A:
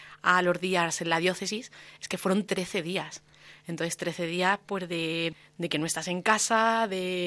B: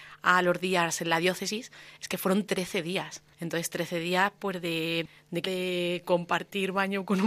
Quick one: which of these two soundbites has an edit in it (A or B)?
B